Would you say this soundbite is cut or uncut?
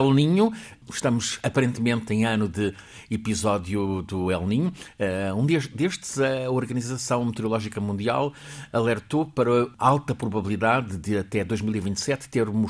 uncut